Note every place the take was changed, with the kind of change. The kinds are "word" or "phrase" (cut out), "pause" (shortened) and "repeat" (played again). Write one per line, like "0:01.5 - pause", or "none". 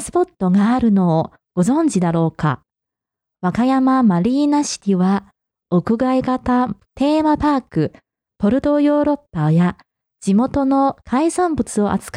none